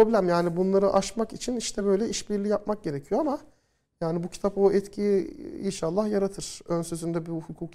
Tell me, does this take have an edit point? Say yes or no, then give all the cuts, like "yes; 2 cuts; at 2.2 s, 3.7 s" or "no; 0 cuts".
no; 0 cuts